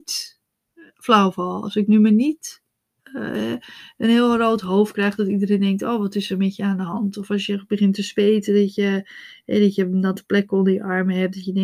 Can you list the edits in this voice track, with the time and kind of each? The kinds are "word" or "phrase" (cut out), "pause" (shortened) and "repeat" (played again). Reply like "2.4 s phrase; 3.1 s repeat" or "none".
none